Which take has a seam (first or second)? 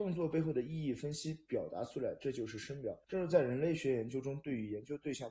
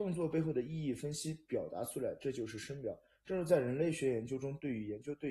first